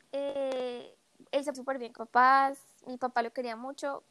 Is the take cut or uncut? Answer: cut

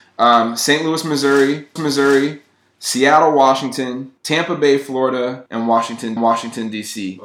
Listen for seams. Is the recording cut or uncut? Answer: cut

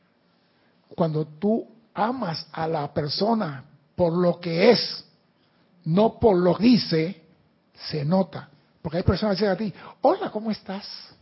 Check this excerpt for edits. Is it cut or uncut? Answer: cut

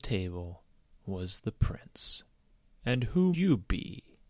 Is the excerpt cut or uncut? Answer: cut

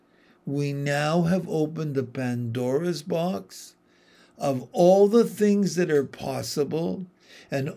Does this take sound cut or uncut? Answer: uncut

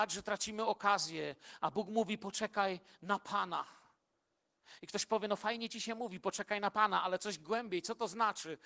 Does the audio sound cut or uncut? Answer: uncut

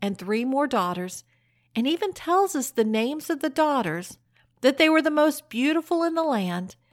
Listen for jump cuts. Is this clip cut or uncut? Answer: uncut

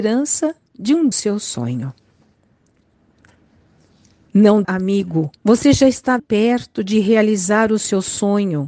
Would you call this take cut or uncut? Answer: cut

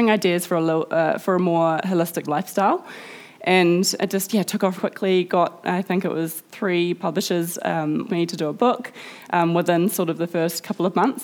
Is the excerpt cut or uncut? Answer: cut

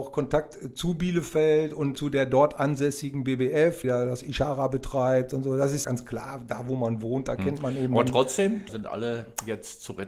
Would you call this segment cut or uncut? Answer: cut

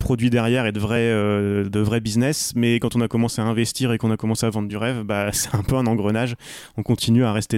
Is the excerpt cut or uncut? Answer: uncut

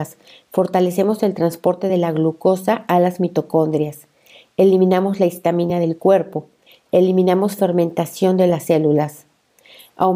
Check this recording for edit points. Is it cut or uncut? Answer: uncut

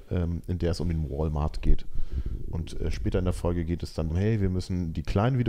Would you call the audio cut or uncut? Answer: cut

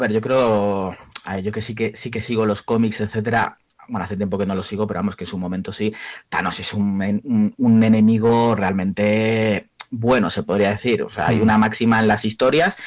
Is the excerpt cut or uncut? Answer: uncut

